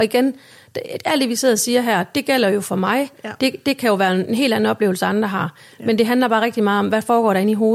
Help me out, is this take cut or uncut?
uncut